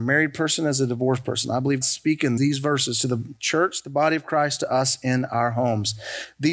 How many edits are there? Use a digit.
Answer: 2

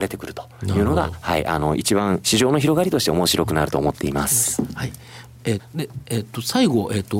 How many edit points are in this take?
1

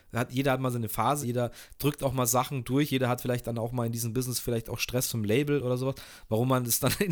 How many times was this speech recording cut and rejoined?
1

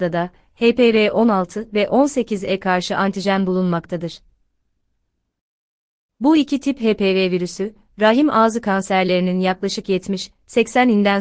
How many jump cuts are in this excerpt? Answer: 0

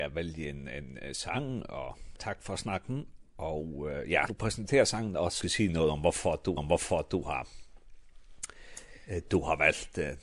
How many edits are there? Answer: 4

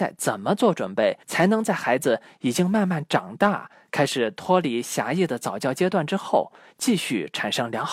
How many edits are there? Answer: 1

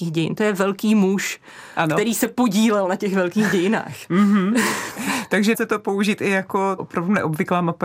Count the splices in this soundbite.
2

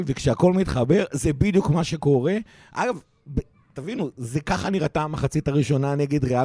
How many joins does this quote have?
0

